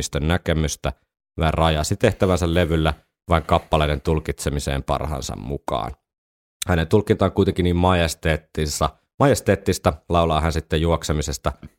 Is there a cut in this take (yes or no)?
no